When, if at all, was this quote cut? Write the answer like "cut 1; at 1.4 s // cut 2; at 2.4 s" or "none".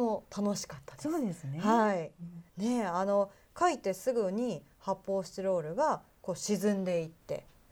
cut 1; at 2.5 s

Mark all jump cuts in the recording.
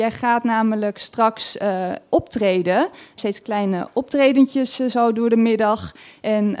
cut 1; at 3.2 s

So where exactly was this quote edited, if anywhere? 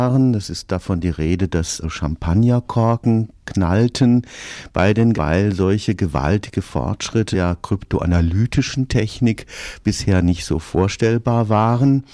cut 1; at 1.8 s // cut 2; at 5.1 s // cut 3; at 7.3 s

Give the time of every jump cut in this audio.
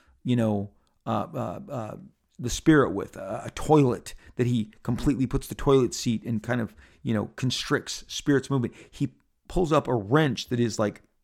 none

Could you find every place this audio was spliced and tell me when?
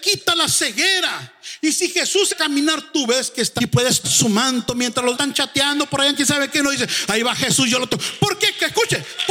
cut 1; at 2.3 s // cut 2; at 3.6 s // cut 3; at 4.0 s // cut 4; at 5.1 s

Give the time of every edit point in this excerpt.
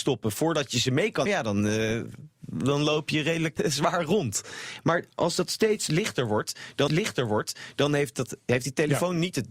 cut 1; at 1.3 s // cut 2; at 3.6 s // cut 3; at 6.9 s

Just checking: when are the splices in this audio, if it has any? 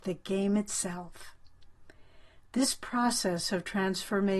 none

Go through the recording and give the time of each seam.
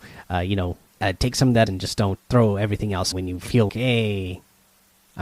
cut 1; at 1.0 s // cut 2; at 1.7 s // cut 3; at 2.2 s // cut 4; at 3.1 s // cut 5; at 3.7 s

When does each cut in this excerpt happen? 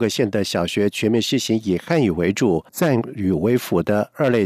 cut 1; at 2.7 s

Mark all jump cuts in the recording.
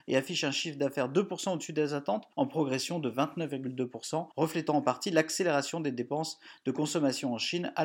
cut 1; at 2.3 s // cut 2; at 4.3 s

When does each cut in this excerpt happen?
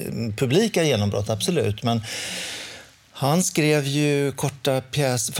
none

